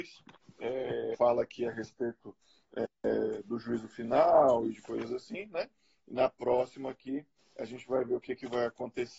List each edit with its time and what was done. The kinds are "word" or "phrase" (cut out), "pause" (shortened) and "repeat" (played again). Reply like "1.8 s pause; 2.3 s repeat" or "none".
none